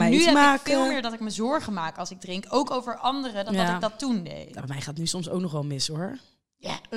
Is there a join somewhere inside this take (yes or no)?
no